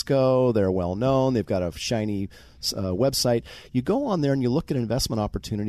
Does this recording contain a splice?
no; 0 cuts

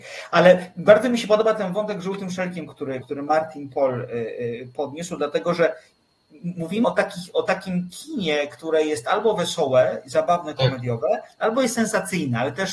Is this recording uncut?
no; 2 cuts; at 3.0 s, 6.8 s

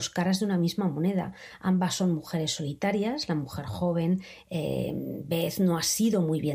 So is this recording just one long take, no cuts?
yes; 0 cuts

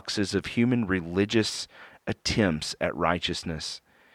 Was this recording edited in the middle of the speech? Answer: no; 0 cuts

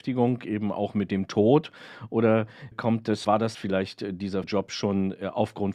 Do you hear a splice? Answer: yes; 4 cuts; at 2.7 s, 3.2 s, 3.5 s, 4.4 s

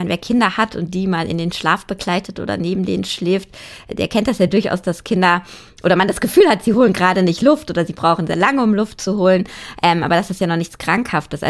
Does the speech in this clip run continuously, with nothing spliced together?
yes; 0 cuts

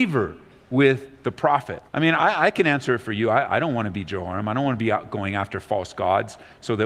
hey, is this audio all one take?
no; 1 cut; at 1.9 s

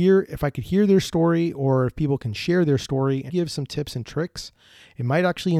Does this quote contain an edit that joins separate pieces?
yes; 1 cut; at 3.3 s

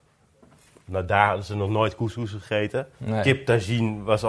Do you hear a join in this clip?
yes; 1 cut; at 2.9 s

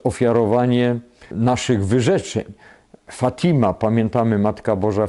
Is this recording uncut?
yes; 0 cuts

